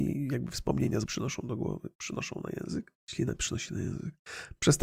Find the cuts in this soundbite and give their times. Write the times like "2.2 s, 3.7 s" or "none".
1.1 s, 1.9 s, 3.0 s